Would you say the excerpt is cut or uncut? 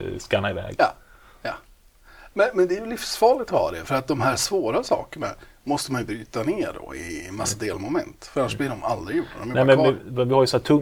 uncut